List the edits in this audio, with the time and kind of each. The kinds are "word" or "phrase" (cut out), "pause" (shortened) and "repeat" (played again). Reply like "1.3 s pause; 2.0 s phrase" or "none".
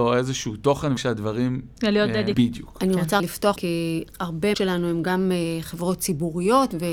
1.0 s word; 2.3 s word; 3.2 s word; 3.6 s word; 4.5 s word